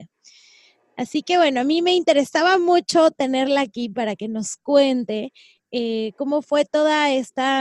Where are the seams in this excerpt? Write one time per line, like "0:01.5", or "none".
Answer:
none